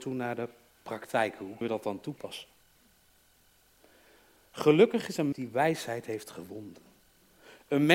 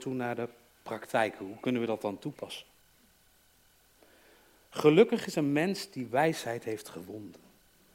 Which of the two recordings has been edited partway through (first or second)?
first